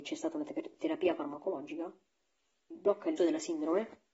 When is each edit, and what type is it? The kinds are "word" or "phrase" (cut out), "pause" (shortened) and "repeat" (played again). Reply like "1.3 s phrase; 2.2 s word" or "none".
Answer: 2.7 s word; 3.2 s word